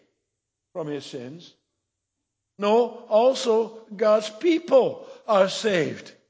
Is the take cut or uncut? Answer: uncut